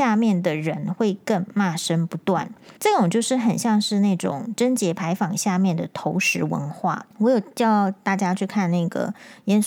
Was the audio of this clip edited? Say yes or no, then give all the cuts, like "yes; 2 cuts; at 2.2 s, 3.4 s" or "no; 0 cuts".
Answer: yes; 2 cuts; at 2.8 s, 7.1 s